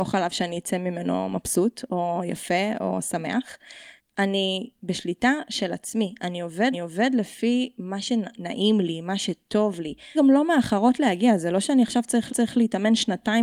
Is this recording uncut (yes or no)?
no